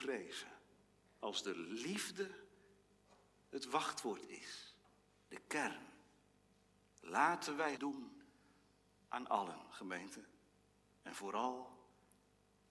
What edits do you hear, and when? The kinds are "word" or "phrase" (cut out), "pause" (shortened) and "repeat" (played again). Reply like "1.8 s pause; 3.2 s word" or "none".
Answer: 7.8 s word